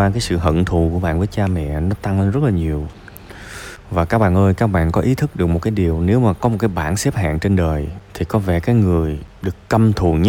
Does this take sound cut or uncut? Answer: uncut